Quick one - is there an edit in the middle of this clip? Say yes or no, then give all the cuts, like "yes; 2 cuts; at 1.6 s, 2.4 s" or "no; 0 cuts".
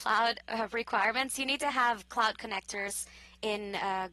no; 0 cuts